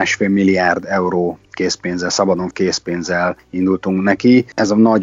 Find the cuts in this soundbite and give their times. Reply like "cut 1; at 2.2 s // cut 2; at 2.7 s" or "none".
cut 1; at 1.4 s // cut 2; at 2.5 s